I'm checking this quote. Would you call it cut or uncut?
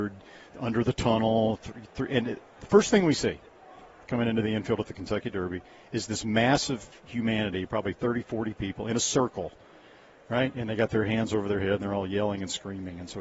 uncut